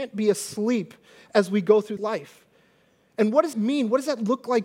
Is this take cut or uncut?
cut